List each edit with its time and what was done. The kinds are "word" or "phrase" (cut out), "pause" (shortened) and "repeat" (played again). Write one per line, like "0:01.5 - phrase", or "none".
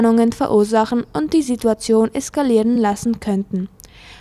none